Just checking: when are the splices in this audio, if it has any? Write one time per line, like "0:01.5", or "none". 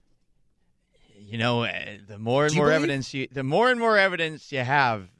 none

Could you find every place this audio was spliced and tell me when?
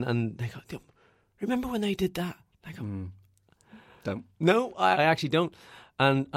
0:04.3
0:04.9

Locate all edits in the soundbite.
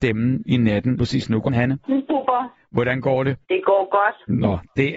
0:01.0
0:01.5
0:01.8
0:03.4

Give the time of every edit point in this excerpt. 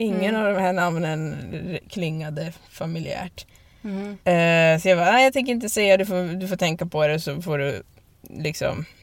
0:04.2

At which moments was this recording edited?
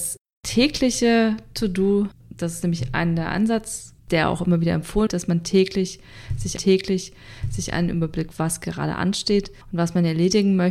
0:02.2
0:04.0
0:05.1
0:06.6
0:08.3
0:09.6

